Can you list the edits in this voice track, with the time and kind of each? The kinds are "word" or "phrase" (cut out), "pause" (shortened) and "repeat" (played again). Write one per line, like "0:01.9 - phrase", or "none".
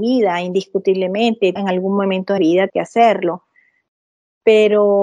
0:01.6 - word
0:02.4 - word
0:02.7 - word